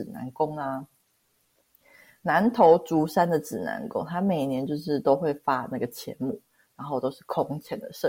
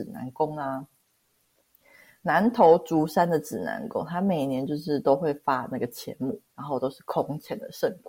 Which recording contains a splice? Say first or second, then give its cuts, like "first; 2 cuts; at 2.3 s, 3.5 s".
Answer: second; 1 cut; at 6.5 s